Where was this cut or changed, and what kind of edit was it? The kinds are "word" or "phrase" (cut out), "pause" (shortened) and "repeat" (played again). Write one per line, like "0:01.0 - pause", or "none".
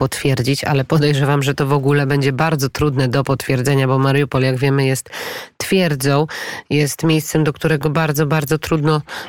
none